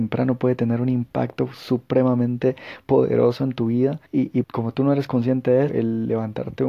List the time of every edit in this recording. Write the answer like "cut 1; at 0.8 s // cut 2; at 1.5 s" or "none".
cut 1; at 4.1 s // cut 2; at 4.4 s // cut 3; at 5.7 s